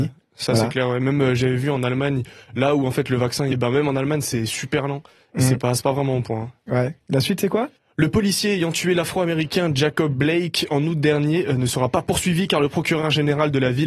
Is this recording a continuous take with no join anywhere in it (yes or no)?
no